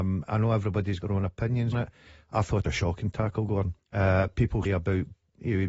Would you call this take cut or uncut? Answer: cut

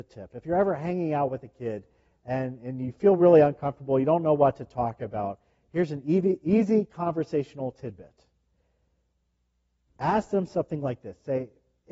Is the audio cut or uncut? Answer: uncut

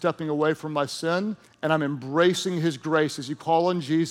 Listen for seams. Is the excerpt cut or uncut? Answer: cut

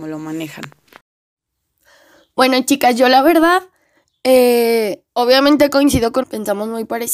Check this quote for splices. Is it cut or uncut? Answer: cut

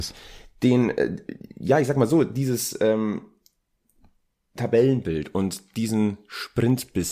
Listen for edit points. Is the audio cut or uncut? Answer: uncut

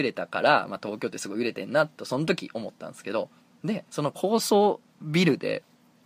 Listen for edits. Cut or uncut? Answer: cut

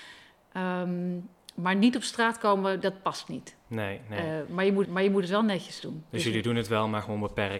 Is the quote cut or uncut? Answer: cut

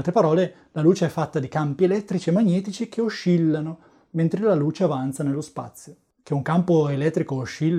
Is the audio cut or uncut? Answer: uncut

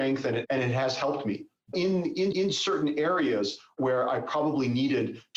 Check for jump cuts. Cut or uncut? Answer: cut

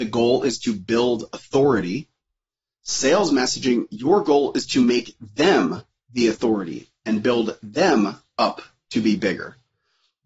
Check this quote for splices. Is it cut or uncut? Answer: uncut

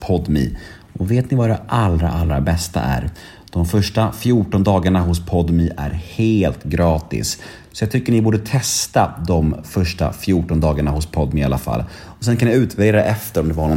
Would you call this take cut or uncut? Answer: uncut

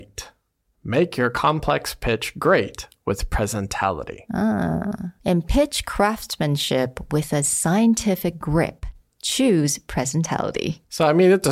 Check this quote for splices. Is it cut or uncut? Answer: uncut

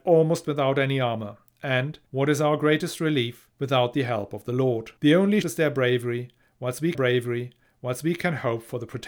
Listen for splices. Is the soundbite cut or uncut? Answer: cut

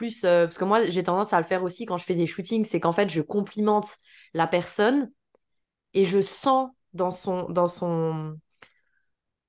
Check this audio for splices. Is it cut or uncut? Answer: uncut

